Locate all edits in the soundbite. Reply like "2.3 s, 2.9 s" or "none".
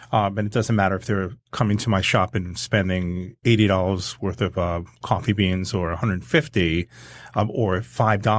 1.4 s